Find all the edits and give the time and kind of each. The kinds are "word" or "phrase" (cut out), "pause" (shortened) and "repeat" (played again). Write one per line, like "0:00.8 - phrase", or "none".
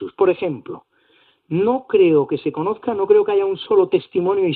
none